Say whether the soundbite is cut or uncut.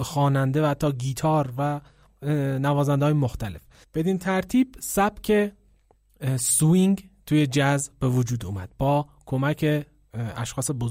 cut